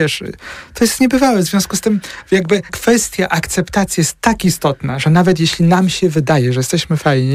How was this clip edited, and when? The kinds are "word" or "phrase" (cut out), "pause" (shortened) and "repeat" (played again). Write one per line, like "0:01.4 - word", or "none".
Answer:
0:02.7 - word